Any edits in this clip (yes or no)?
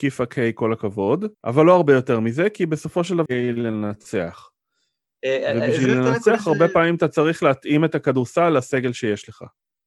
yes